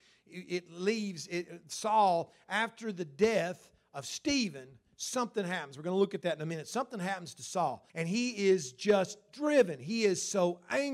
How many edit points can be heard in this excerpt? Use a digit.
1